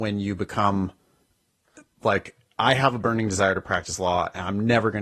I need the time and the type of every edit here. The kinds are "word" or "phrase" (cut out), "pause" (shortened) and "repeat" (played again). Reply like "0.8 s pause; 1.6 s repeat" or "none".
none